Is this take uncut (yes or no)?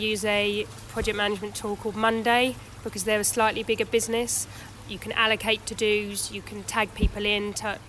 yes